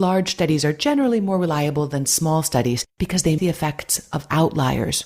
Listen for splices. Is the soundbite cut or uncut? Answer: cut